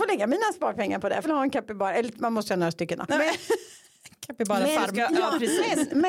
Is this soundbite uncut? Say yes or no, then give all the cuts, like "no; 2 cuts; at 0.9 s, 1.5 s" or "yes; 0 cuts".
no; 1 cut; at 1.2 s